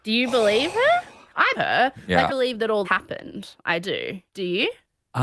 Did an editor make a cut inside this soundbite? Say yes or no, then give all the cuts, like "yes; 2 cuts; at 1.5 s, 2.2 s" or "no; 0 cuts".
yes; 4 cuts; at 1.5 s, 2.3 s, 2.8 s, 4.3 s